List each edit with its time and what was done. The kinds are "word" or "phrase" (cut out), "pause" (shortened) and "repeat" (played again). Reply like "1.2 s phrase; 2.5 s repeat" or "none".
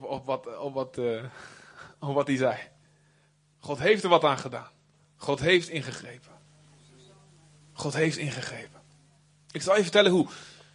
none